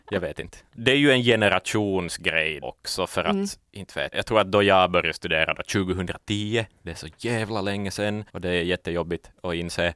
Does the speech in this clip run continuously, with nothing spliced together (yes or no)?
no